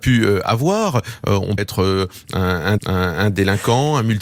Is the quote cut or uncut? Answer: cut